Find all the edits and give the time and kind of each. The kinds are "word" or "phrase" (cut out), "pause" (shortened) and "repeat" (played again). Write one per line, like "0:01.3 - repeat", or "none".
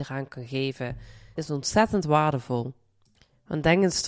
0:01.4 - word